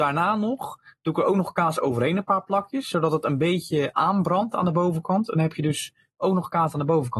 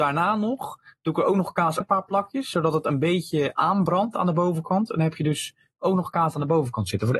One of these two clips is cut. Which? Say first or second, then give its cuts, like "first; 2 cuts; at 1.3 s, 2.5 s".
second; 1 cut; at 1.8 s